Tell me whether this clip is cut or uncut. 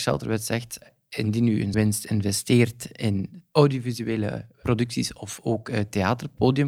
cut